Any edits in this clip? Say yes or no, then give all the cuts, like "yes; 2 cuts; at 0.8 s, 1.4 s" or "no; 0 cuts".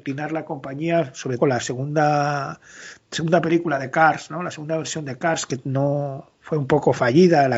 yes; 1 cut; at 1.4 s